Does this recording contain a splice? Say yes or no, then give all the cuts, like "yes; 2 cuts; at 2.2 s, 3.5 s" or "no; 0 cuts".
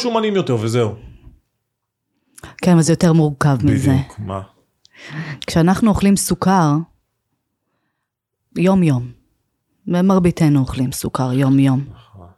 no; 0 cuts